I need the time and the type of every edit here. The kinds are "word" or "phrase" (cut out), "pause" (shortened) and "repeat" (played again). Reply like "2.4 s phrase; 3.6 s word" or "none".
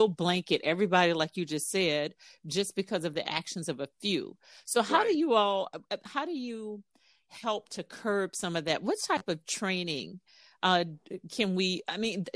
none